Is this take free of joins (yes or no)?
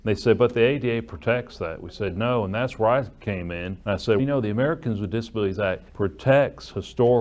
no